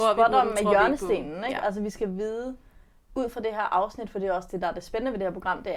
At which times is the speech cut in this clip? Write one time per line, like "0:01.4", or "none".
none